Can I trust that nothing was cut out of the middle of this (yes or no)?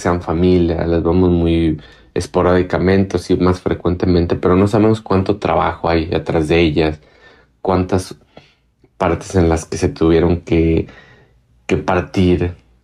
yes